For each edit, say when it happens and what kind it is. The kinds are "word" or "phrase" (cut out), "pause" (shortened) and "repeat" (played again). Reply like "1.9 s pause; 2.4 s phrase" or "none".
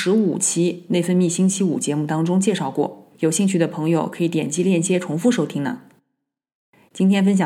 3.1 s pause